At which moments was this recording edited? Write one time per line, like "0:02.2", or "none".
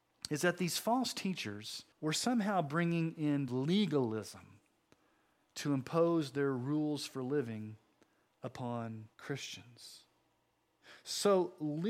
0:01.9
0:03.5
0:09.1